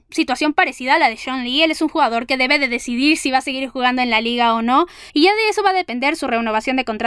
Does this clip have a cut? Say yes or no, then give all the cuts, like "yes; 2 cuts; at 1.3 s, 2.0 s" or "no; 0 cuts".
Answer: yes; 1 cut; at 5.1 s